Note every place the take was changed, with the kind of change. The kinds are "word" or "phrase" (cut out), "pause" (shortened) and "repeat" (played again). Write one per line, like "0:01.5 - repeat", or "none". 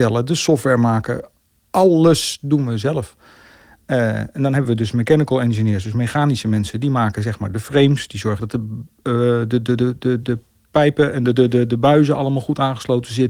none